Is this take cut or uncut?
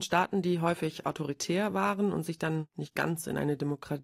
uncut